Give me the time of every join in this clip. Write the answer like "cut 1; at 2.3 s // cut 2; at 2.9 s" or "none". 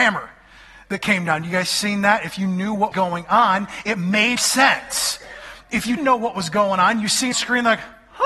cut 1; at 2.9 s // cut 2; at 4.4 s // cut 3; at 6.0 s // cut 4; at 7.3 s